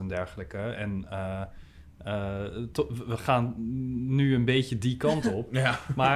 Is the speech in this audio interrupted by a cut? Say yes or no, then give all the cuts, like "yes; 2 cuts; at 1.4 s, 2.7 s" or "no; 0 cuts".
no; 0 cuts